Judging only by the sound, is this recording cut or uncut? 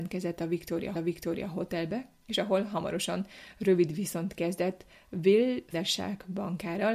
cut